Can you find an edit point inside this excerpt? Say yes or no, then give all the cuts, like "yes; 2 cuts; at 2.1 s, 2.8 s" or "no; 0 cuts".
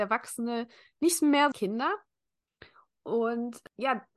yes; 1 cut; at 1.5 s